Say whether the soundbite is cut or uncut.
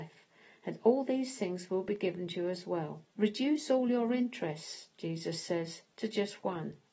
cut